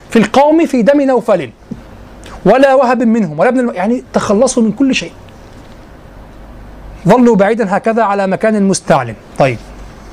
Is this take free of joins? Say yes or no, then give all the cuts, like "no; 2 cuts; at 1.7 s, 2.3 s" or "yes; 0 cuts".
yes; 0 cuts